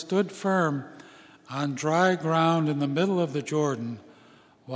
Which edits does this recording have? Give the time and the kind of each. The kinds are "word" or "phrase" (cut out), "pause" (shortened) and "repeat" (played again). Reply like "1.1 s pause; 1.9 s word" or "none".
none